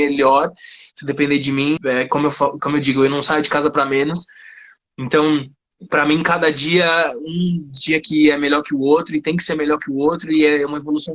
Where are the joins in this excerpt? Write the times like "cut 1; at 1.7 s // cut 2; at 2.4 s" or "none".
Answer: cut 1; at 1.8 s